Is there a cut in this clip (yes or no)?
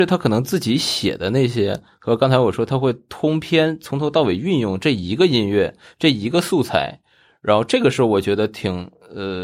no